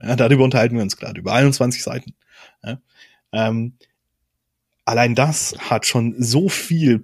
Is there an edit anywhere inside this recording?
no; 0 cuts

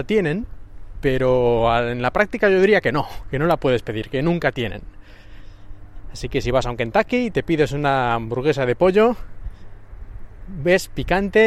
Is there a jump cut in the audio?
no; 0 cuts

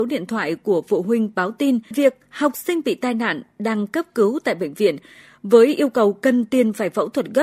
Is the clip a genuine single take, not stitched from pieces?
no; 1 cut; at 1.9 s

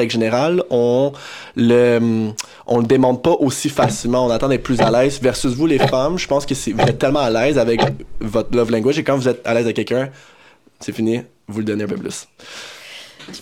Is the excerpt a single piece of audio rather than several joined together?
yes; 0 cuts

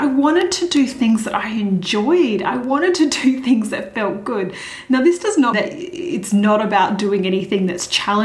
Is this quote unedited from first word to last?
no; 1 cut; at 5.5 s

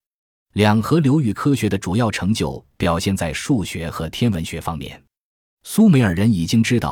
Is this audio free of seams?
yes; 0 cuts

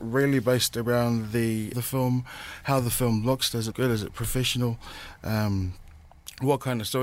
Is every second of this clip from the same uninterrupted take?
no; 2 cuts; at 1.7 s, 3.7 s

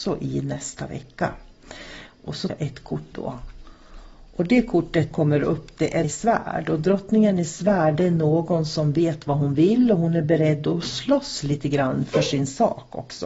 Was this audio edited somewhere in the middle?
yes; 4 cuts; at 2.5 s, 3.1 s, 5.1 s, 6.0 s

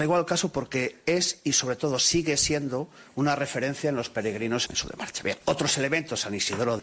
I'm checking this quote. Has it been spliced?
yes; 1 cut; at 5.4 s

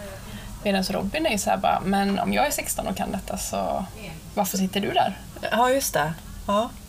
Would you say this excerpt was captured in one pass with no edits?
yes; 0 cuts

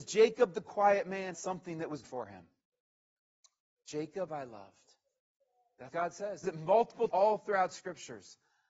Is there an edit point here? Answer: yes; 6 cuts; at 1.3 s, 2.0 s, 4.3 s, 5.9 s, 6.4 s, 7.1 s

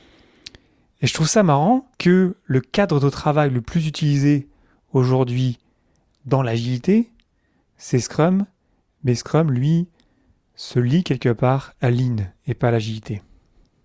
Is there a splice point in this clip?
yes; 1 cut; at 1.9 s

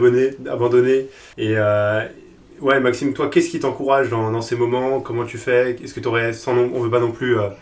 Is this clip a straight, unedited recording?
no; 1 cut; at 1.3 s

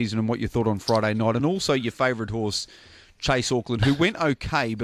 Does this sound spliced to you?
no; 0 cuts

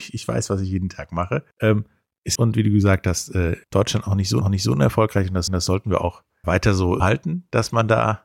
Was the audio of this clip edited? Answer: yes; 7 cuts; at 1.5 s, 2.4 s, 3.6 s, 4.4 s, 5.5 s, 6.4 s, 7.0 s

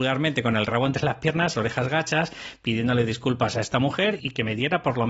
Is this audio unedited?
no; 2 cuts; at 1.5 s, 4.2 s

